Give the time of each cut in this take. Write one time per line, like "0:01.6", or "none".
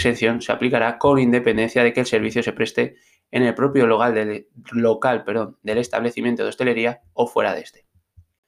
none